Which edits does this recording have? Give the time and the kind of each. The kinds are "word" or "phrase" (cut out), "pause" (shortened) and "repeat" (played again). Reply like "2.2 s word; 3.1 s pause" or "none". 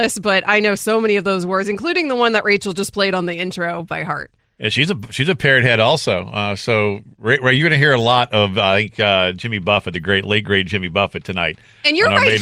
none